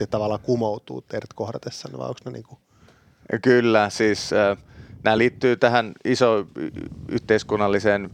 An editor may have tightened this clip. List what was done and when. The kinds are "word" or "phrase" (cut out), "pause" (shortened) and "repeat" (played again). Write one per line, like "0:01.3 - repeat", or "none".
none